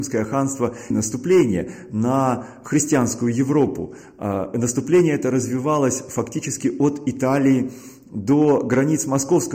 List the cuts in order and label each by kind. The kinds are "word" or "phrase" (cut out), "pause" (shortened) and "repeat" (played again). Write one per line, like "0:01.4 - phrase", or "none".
0:00.9 - word